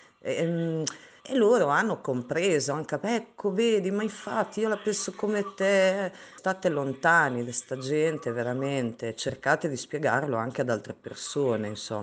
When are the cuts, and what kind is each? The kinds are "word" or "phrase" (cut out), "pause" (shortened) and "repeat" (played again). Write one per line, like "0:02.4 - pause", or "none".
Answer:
0:01.2 - word